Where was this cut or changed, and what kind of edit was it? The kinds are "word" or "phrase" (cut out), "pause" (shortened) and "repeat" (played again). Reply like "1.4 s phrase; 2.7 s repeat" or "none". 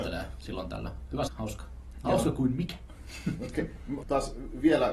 1.3 s phrase; 4.0 s phrase